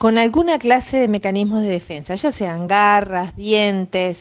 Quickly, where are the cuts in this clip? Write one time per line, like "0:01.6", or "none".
none